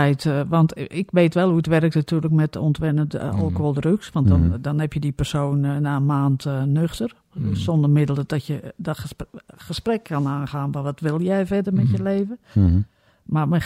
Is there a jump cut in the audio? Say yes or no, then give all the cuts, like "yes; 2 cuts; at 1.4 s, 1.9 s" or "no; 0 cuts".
no; 0 cuts